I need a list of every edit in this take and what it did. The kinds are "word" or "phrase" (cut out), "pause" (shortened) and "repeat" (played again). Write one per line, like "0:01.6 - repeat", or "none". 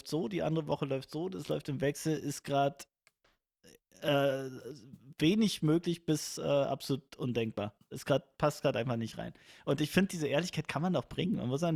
none